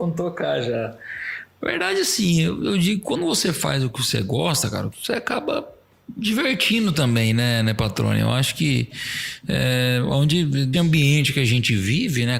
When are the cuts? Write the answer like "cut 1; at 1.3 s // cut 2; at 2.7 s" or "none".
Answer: cut 1; at 4.9 s // cut 2; at 10.7 s